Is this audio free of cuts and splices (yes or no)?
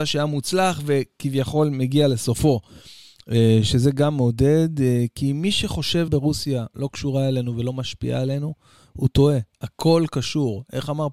no